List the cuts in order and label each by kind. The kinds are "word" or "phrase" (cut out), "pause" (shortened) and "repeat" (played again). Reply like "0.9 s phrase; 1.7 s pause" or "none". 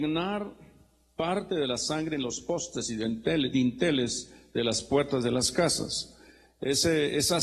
none